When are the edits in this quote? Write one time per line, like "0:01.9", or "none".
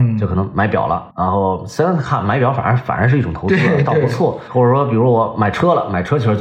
0:01.1